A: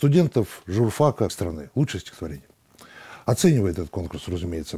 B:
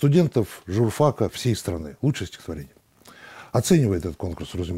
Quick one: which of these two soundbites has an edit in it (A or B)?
A